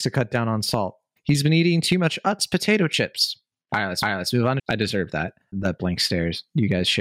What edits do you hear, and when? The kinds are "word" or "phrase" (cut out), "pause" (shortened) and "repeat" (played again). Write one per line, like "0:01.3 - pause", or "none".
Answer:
0:04.0 - repeat
0:04.6 - phrase
0:05.5 - word